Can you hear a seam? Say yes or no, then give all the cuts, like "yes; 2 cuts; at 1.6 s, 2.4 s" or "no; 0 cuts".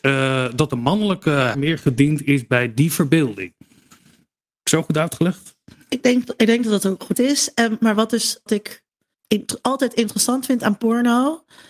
yes; 4 cuts; at 1.5 s, 7.1 s, 8.5 s, 9.1 s